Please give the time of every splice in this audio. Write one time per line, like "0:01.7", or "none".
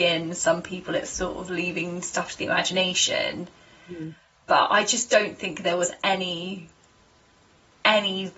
none